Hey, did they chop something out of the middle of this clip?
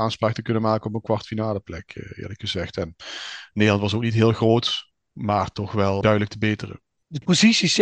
no; 0 cuts

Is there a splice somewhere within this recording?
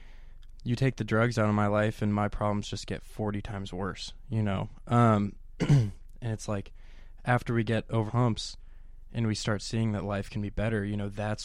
yes; 1 cut; at 8.1 s

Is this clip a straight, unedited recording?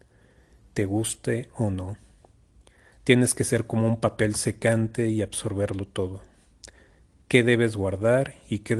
yes; 0 cuts

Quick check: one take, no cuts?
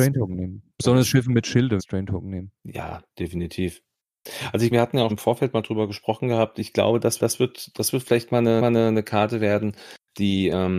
no; 6 cuts; at 1.8 s, 2.6 s, 4.7 s, 5.1 s, 7.2 s, 8.6 s

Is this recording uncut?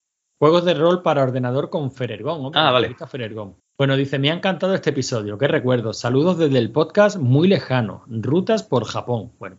no; 1 cut; at 3.6 s

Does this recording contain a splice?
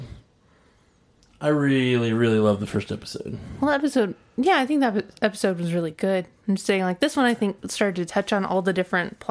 no; 0 cuts

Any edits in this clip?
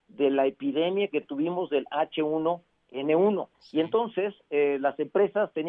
yes; 1 cut; at 3.5 s

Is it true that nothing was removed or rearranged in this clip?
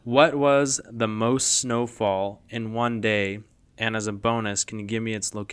yes; 0 cuts

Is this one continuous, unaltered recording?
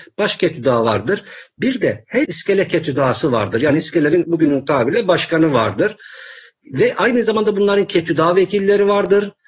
no; 2 cuts; at 2.2 s, 4.2 s

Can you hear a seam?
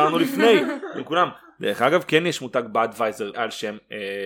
yes; 1 cut; at 3.3 s

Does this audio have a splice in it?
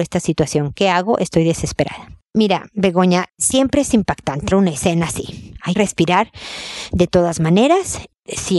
yes; 2 cuts; at 4.5 s, 5.7 s

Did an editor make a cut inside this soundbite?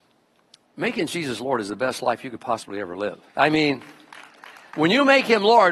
yes; 1 cut; at 3.3 s

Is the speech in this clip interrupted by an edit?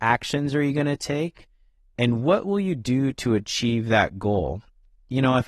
no; 0 cuts

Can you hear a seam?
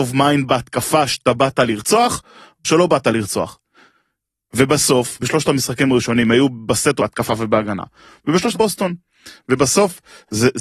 yes; 4 cuts; at 2.6 s, 5.2 s, 7.0 s, 8.5 s

